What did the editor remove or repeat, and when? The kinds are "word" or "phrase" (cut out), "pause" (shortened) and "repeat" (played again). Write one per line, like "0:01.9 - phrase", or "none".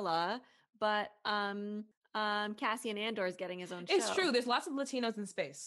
none